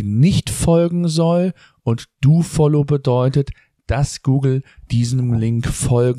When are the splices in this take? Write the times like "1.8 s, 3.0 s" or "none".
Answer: none